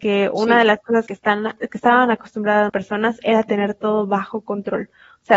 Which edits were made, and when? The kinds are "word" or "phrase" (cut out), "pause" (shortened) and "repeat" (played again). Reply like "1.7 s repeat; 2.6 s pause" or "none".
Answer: 1.1 s phrase; 2.7 s word